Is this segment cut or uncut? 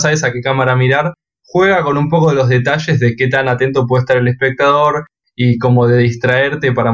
uncut